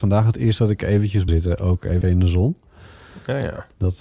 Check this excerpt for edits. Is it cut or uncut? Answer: cut